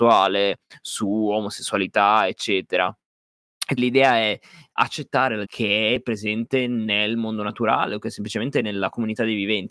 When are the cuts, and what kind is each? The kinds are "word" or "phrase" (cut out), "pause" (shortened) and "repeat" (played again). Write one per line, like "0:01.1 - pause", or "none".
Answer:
0:03.8 - word
0:04.8 - word
0:05.4 - word

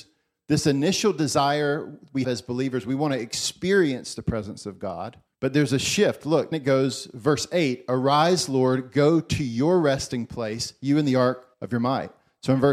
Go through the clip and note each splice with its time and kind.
0:02.2 - word
0:05.3 - pause
0:06.5 - word
0:11.5 - pause

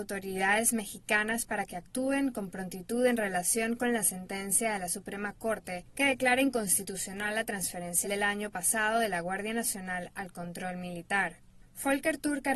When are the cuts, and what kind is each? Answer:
0:08.0 - word

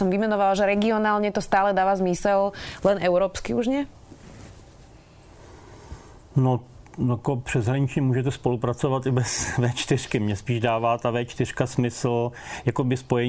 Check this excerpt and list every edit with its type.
0:06.9 - pause

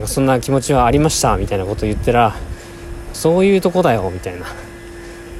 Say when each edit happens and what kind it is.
0:03.1 - phrase

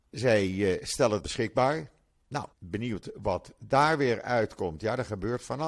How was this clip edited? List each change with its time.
0:01.2 - word
0:02.5 - pause

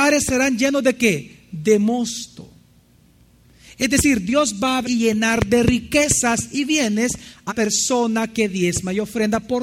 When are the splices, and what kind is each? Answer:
0:04.8 - word
0:07.5 - word

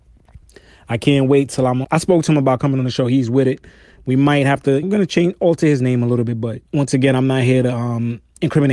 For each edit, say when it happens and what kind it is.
0:01.8 - word
0:04.8 - phrase
0:06.7 - pause

